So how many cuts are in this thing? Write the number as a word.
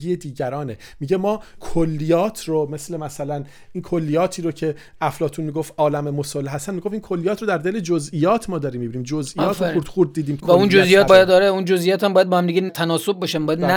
four